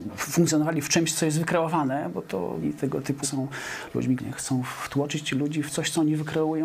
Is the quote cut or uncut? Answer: cut